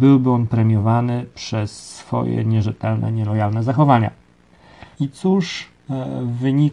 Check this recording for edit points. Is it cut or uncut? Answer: cut